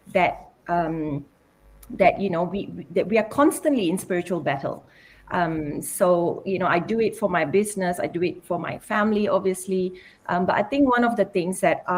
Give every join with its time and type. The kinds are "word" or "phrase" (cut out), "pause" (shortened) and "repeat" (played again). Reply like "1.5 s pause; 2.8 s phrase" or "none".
none